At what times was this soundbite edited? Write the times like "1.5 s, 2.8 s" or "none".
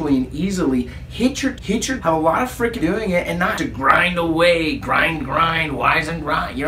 1.6 s, 2.0 s, 2.8 s, 3.6 s, 5.2 s